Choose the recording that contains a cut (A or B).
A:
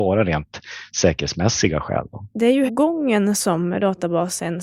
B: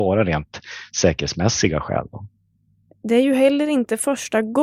A